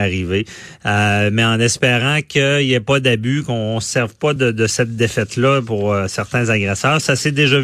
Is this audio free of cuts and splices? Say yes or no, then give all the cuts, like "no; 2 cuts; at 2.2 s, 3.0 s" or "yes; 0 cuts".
yes; 0 cuts